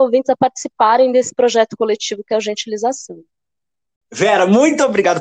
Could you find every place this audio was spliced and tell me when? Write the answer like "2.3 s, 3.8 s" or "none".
none